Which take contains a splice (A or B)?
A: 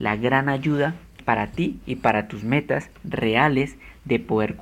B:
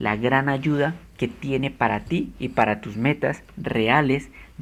A